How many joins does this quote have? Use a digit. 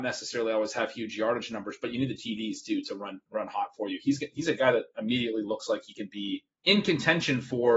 1